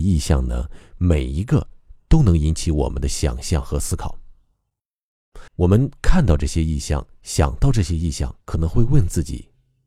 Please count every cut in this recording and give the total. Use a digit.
2